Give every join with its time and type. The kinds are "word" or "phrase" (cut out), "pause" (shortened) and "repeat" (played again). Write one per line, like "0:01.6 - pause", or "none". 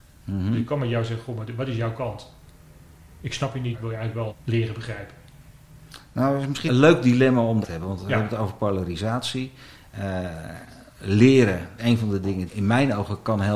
0:03.7 - word
0:04.3 - word
0:06.7 - word
0:07.6 - word
0:11.8 - word
0:12.5 - word

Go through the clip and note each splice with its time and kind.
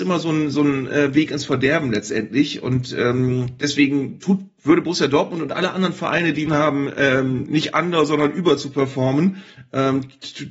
0:06.5 - phrase

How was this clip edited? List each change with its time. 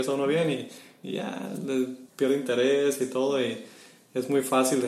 0:02.1 - pause

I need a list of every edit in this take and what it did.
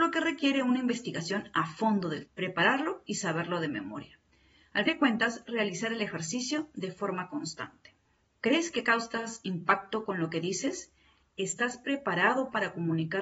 0:02.3 - word
0:04.9 - word

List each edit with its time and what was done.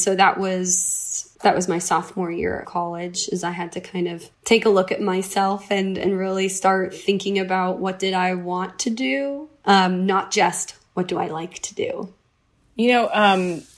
0:01.3 - pause
0:02.6 - word
0:04.3 - pause

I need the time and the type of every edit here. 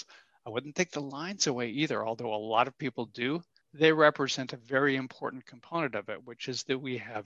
0:03.6 - pause

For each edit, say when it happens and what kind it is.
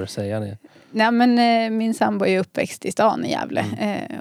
none

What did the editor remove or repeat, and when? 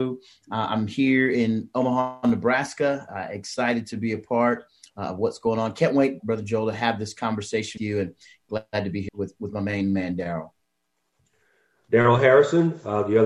0:06.2 - word
0:07.8 - word
0:09.1 - word

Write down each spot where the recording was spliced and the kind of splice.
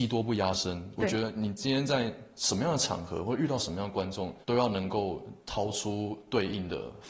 0:04.4 - pause

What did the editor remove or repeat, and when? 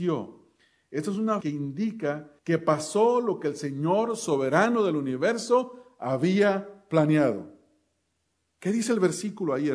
0:01.4 - word
0:02.4 - pause

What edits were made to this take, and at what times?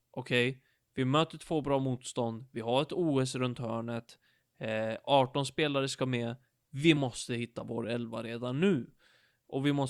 none

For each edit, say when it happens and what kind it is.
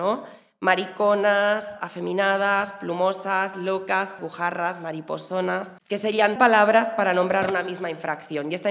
0:03.5 - word
0:04.2 - word
0:05.8 - pause
0:06.4 - word

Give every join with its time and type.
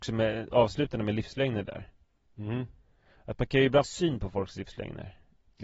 0:03.8 - word

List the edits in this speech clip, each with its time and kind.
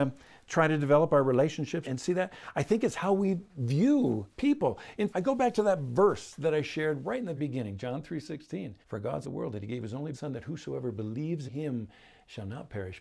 0:01.8 - word
0:04.3 - pause
0:05.1 - word
0:07.4 - word
0:08.8 - pause
0:09.2 - phrase
0:10.1 - word
0:11.5 - word

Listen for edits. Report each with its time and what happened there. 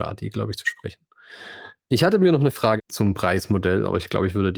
0:02.8 - word

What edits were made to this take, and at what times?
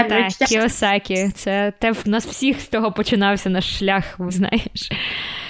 0:02.0 - word
0:04.3 - word

